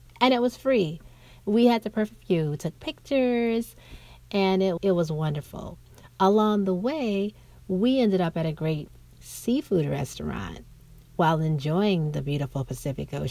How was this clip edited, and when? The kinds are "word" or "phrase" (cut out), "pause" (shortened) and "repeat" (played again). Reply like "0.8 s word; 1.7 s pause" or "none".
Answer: 4.8 s word